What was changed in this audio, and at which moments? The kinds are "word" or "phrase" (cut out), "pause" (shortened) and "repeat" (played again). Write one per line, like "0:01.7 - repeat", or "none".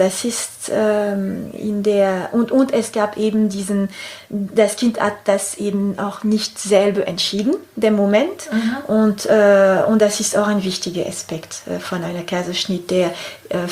none